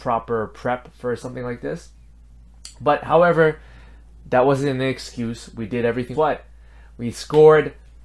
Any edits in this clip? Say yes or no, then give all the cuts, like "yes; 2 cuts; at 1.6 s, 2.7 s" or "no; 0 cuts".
yes; 1 cut; at 6.1 s